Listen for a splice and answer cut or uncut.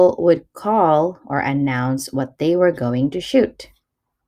uncut